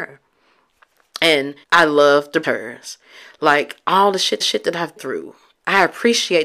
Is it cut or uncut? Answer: cut